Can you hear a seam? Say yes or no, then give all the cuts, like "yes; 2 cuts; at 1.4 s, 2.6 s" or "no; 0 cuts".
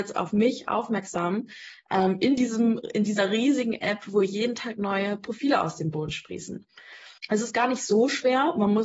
yes; 1 cut; at 7.2 s